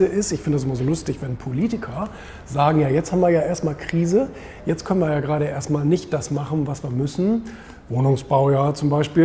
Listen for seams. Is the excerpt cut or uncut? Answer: uncut